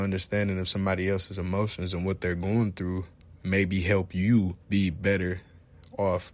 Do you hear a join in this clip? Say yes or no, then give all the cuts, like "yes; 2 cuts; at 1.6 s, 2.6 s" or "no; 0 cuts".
yes; 1 cut; at 4.6 s